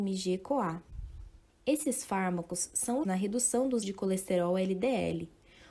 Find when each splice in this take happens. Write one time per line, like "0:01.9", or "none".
0:01.5
0:03.0
0:03.8